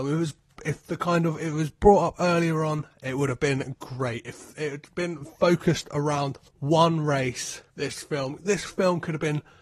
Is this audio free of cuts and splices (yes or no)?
no